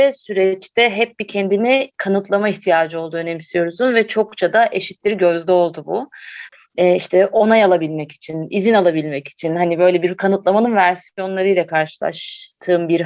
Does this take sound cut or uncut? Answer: uncut